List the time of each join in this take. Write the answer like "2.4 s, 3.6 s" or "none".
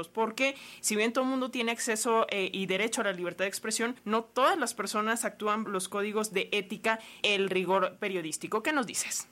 4.0 s, 5.6 s, 7.2 s